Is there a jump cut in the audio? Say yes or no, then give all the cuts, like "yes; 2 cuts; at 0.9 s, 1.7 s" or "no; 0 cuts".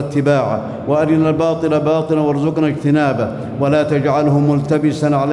no; 0 cuts